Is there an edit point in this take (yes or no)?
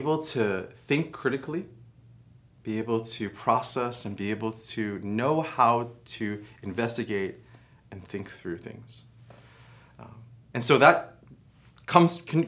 no